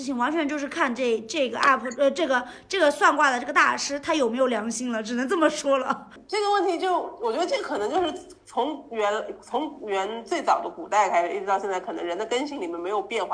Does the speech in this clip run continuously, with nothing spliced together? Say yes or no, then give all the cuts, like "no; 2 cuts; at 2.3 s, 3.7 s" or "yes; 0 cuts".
yes; 0 cuts